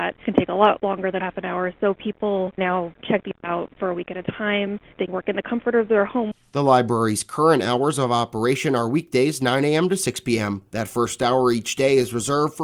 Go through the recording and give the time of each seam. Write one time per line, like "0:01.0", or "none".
0:02.6
0:05.1